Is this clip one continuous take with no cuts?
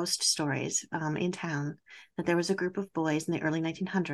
yes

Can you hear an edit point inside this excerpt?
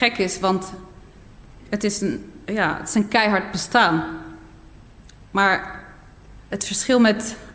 no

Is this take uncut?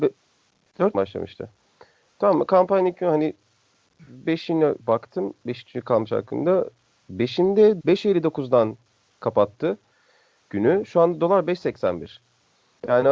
no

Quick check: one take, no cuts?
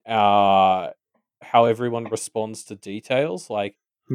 yes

